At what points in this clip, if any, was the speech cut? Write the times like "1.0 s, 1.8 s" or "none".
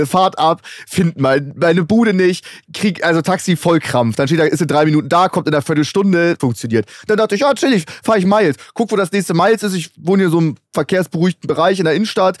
6.4 s